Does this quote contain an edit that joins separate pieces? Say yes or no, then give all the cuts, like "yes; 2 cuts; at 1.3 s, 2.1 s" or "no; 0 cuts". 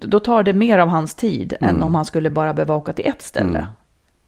no; 0 cuts